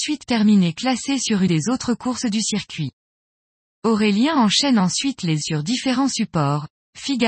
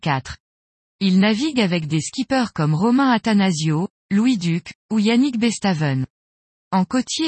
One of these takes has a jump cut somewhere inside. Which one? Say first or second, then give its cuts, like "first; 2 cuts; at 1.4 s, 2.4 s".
first; 2 cuts; at 1.5 s, 5.4 s